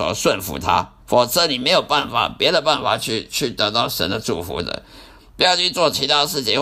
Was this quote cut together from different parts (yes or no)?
yes